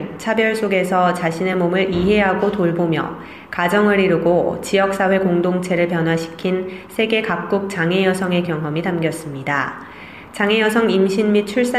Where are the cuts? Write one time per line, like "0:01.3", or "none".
none